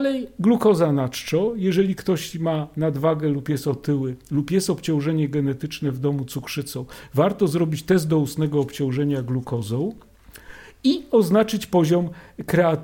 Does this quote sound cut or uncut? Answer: uncut